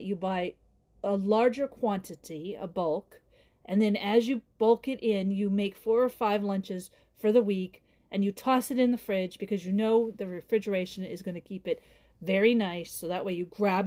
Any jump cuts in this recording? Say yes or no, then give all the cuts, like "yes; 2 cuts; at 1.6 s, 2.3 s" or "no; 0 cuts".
no; 0 cuts